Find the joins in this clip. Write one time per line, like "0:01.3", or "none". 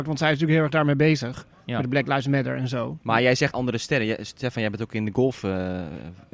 0:03.5